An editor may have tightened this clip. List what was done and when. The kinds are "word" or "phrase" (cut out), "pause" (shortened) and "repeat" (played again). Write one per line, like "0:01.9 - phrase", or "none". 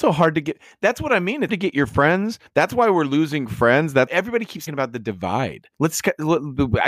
0:01.5 - word
0:02.5 - pause
0:04.1 - word
0:04.7 - word
0:05.7 - pause

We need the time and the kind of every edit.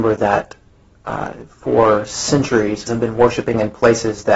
0:02.9 - word

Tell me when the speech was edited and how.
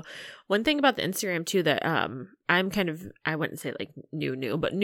none

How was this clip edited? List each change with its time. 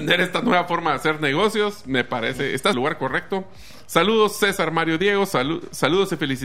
0:02.7 - phrase

